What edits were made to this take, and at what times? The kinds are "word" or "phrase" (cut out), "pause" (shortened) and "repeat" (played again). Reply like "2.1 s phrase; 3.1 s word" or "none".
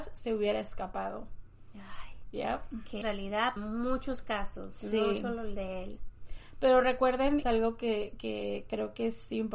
3.0 s phrase; 3.6 s word; 7.4 s phrase